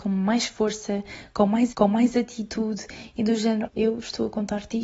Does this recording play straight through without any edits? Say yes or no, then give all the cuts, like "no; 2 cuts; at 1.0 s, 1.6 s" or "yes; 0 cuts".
no; 2 cuts; at 1.7 s, 3.7 s